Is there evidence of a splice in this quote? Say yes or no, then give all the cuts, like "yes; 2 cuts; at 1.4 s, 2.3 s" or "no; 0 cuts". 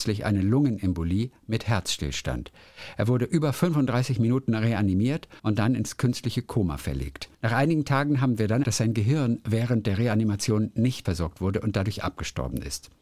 yes; 4 cuts; at 5.4 s, 7.3 s, 8.6 s, 11.0 s